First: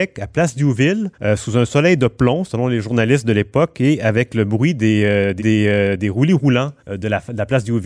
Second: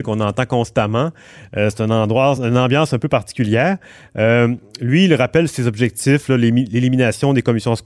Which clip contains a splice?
first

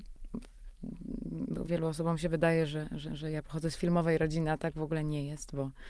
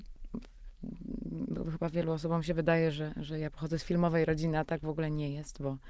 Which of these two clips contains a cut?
first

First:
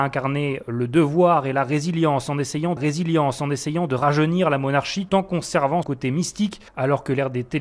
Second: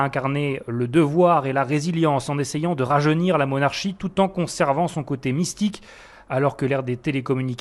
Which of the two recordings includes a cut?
first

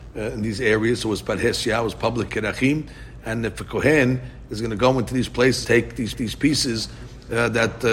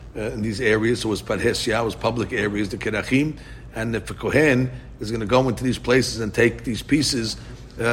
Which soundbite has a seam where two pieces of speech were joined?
first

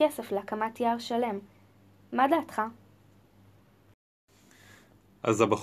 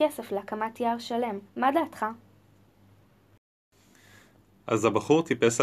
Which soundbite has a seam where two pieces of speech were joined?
second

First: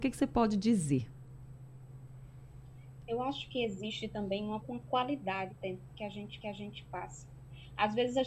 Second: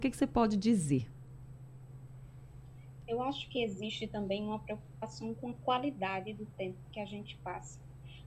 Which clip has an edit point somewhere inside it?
first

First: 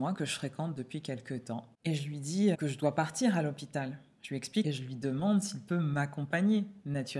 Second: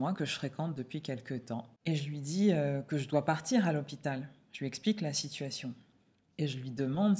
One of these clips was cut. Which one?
first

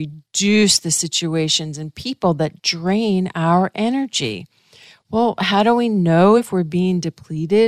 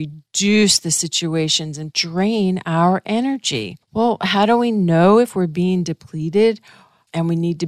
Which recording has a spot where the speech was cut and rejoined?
second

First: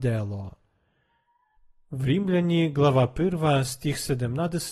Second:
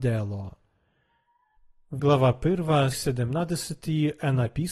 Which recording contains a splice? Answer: second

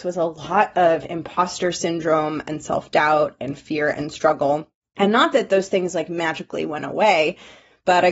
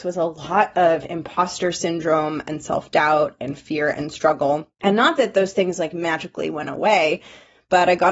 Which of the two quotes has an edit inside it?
second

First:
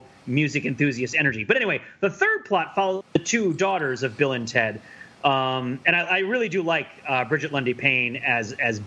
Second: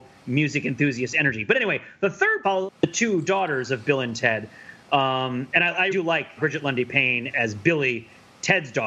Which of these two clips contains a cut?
second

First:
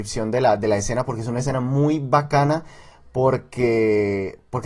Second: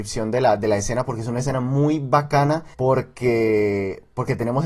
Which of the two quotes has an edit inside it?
second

